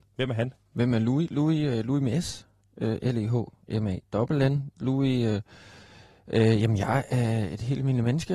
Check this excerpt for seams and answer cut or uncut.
uncut